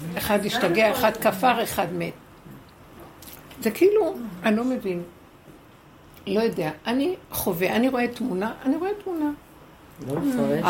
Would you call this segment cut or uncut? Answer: uncut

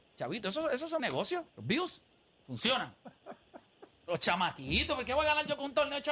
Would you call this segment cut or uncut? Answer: cut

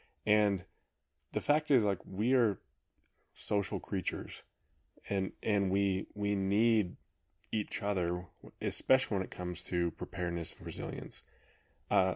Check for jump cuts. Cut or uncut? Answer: uncut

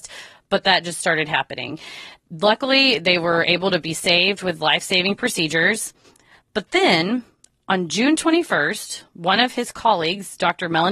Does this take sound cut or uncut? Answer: uncut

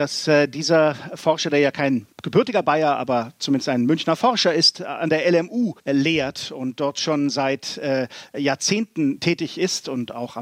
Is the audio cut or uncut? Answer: cut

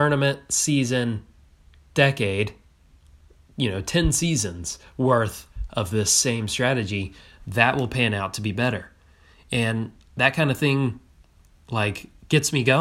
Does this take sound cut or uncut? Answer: uncut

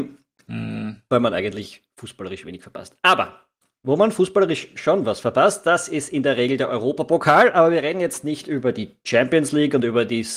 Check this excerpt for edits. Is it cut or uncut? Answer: uncut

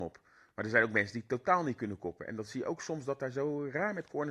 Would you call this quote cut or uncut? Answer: uncut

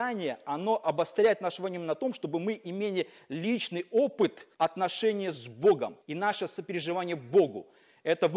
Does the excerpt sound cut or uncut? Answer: cut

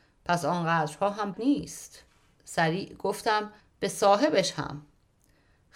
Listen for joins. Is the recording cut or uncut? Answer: cut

